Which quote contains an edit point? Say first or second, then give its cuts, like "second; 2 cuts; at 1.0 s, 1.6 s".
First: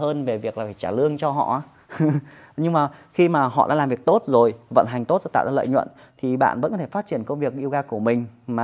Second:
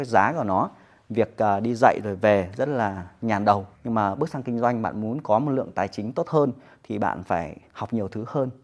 second; 1 cut; at 3.7 s